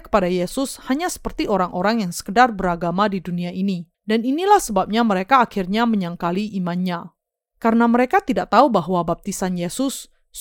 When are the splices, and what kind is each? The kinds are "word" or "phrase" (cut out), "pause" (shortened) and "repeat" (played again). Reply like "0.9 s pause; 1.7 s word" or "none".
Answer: 3.9 s pause